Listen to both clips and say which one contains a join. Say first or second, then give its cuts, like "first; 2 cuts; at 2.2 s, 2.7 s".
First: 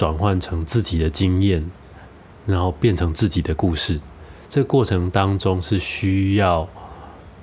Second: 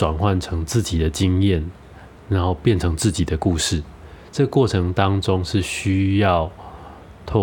second; 1 cut; at 2.2 s